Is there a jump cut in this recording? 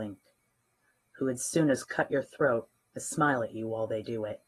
no; 0 cuts

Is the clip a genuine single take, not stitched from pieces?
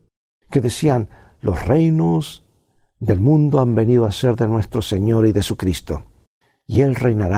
yes; 0 cuts

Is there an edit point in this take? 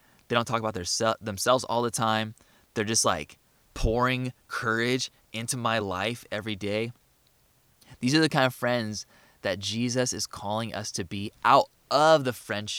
no; 0 cuts

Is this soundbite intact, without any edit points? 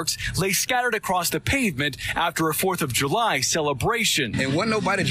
yes; 0 cuts

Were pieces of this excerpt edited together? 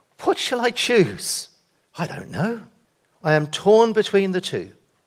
no; 0 cuts

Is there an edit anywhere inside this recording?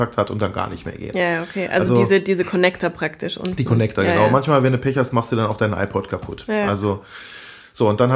no; 0 cuts

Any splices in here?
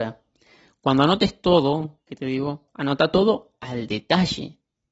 no; 0 cuts

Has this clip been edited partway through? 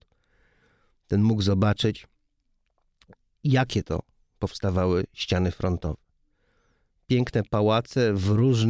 no; 0 cuts

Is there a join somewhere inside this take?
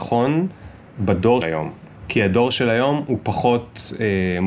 yes; 1 cut; at 1.4 s

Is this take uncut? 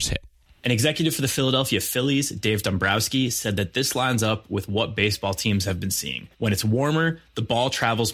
no; 1 cut; at 6.3 s

